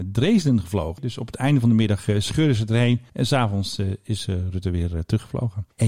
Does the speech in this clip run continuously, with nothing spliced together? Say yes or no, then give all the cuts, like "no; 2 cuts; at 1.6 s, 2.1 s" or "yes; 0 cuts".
yes; 0 cuts